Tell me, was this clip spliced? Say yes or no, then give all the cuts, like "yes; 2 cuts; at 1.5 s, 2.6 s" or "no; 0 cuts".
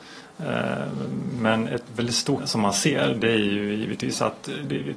yes; 1 cut; at 2.4 s